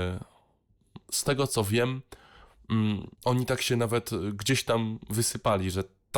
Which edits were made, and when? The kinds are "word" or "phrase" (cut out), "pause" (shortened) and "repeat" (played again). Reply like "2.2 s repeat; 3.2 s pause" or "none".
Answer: 3.1 s pause